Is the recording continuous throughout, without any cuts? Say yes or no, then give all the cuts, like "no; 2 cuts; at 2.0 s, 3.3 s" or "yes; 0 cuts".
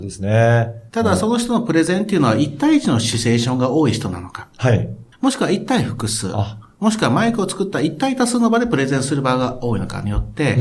no; 1 cut; at 5.1 s